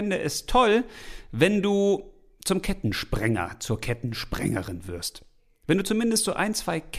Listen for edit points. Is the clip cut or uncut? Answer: uncut